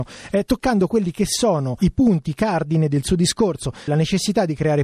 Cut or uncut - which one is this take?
cut